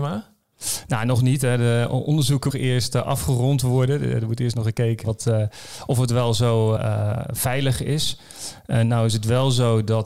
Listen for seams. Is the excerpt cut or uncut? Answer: cut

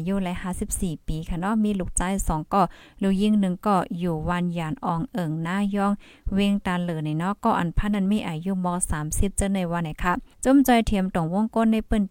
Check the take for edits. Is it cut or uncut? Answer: cut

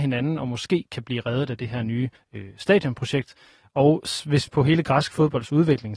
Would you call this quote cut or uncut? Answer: cut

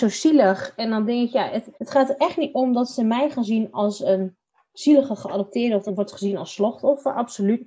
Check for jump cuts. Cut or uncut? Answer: cut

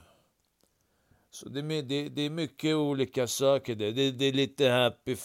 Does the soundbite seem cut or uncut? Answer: uncut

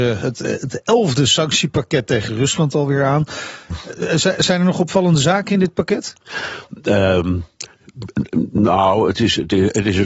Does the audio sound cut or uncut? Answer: uncut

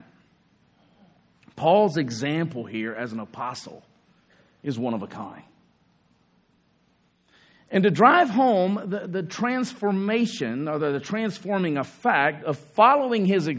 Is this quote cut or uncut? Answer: uncut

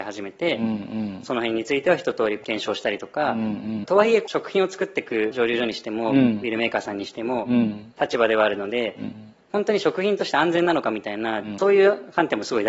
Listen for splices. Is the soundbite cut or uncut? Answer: uncut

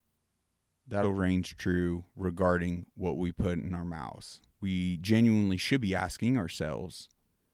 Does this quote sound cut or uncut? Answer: cut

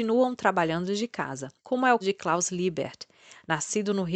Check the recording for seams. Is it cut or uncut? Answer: cut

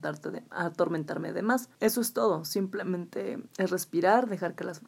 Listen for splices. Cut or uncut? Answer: cut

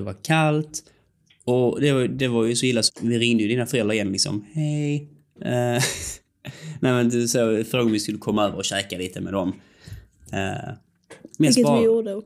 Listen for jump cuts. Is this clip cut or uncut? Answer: cut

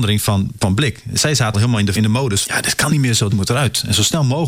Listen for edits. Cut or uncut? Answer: cut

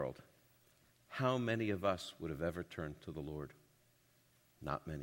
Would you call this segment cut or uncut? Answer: uncut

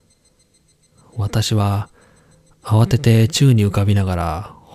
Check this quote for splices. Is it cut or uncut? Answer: uncut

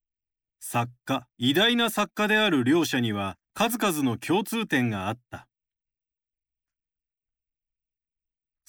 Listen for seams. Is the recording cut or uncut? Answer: cut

